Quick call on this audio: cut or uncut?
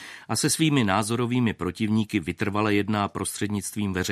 uncut